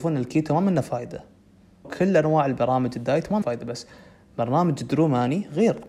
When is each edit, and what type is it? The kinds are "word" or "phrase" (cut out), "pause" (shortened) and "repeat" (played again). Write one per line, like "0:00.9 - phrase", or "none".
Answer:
0:01.8 - word
0:03.4 - word